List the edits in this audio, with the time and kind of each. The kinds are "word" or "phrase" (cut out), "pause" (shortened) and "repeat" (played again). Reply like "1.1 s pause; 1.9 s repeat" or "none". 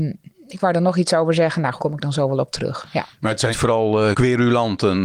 1.8 s word; 3.5 s word; 4.1 s word